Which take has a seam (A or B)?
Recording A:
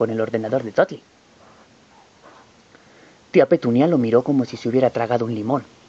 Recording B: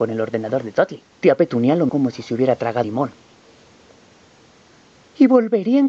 B